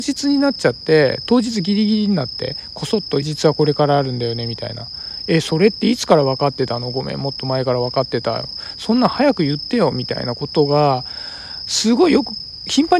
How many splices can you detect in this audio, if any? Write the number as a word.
one